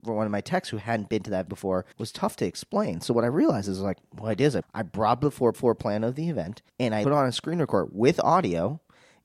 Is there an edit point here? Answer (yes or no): yes